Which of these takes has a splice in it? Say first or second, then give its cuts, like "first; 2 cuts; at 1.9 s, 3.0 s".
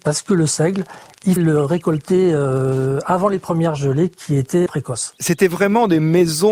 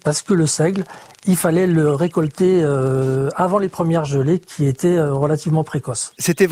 first; 2 cuts; at 1.4 s, 4.7 s